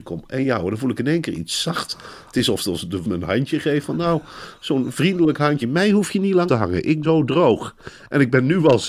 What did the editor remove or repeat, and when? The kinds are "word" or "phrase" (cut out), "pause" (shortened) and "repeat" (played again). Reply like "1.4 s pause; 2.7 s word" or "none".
3.0 s word; 5.6 s word; 6.5 s word; 7.0 s word